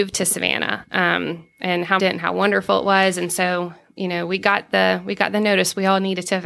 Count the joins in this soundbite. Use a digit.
2